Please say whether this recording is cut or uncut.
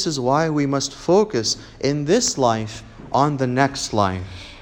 uncut